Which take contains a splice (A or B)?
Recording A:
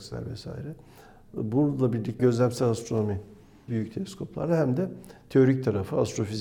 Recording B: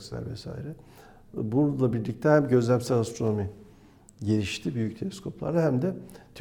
A